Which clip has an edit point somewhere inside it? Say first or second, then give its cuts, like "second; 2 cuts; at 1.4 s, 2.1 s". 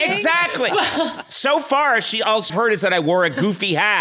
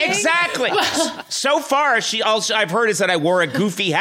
first; 1 cut; at 2.5 s